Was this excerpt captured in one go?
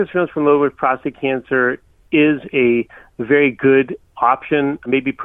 yes; 0 cuts

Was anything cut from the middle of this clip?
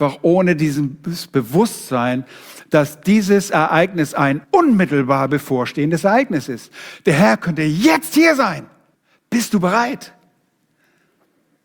yes; 2 cuts; at 4.4 s, 8.9 s

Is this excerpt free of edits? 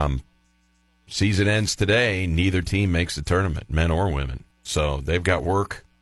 no; 1 cut; at 4.5 s

